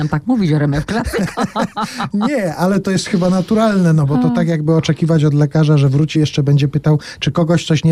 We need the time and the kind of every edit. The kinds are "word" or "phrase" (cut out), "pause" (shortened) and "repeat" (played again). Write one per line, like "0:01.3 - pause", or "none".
0:06.1 - phrase